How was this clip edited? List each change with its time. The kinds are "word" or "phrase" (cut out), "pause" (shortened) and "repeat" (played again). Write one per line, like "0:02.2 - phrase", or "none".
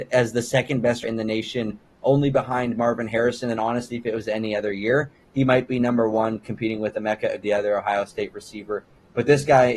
0:01.0 - word
0:07.4 - word